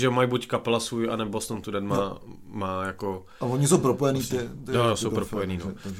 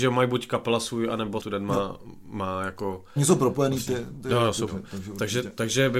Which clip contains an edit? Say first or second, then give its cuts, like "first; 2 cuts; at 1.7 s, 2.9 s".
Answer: second; 3 cuts; at 1.4 s, 3.2 s, 4.7 s